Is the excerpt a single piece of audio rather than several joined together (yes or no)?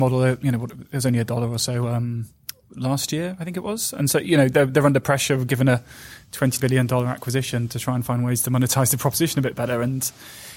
no